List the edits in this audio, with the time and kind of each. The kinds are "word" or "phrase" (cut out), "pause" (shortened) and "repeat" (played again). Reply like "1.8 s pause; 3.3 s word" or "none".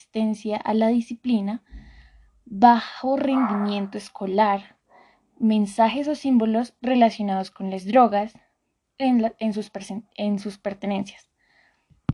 none